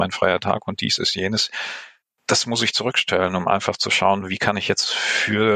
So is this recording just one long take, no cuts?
yes; 0 cuts

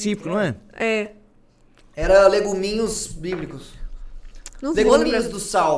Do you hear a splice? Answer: no; 0 cuts

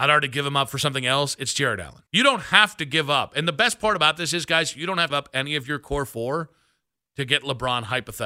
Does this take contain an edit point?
yes; 2 cuts; at 2.1 s, 5.1 s

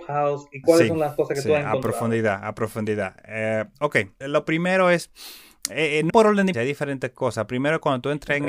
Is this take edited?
yes; 3 cuts; at 4.2 s, 6.1 s, 6.5 s

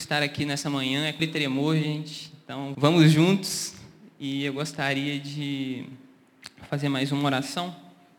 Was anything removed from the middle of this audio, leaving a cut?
yes; 2 cuts; at 1.2 s, 2.7 s

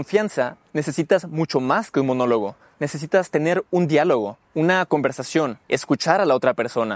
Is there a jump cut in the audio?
yes; 2 cuts; at 4.4 s, 5.6 s

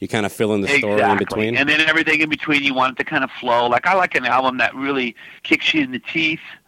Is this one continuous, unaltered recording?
no; 1 cut; at 5.4 s

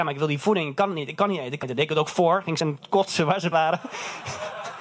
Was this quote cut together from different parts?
yes; 3 cuts; at 1.6 s, 2.6 s, 3.5 s

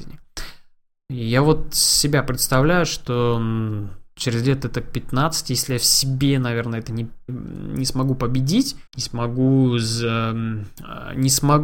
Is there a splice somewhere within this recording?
yes; 2 cuts; at 7.3 s, 8.9 s

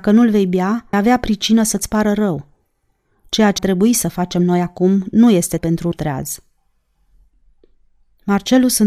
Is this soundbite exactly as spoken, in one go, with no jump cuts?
no; 4 cuts; at 0.9 s, 3.6 s, 5.6 s, 5.9 s

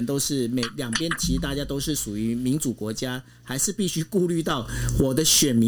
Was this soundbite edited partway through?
no; 0 cuts

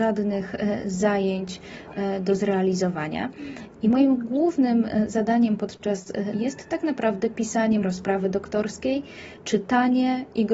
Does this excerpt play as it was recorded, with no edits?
no; 2 cuts; at 6.3 s, 7.8 s

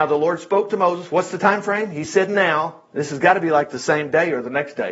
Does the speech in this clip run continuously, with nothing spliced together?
yes; 0 cuts

